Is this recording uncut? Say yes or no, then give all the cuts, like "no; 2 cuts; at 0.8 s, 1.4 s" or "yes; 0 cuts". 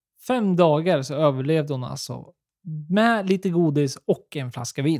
yes; 0 cuts